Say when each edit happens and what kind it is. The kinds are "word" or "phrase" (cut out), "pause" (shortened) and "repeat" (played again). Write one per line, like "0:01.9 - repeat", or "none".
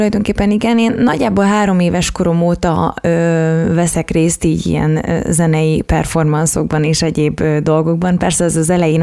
none

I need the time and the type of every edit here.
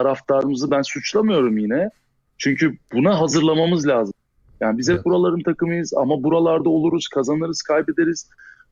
none

